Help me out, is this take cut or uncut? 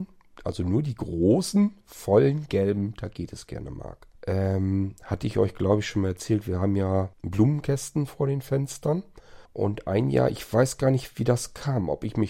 cut